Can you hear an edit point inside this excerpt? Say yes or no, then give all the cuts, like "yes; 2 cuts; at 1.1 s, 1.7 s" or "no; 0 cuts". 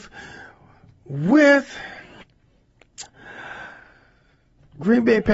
no; 0 cuts